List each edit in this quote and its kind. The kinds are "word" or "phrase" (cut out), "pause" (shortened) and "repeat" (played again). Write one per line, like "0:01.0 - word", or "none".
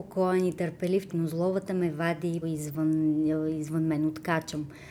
0:01.1 - word
0:02.4 - word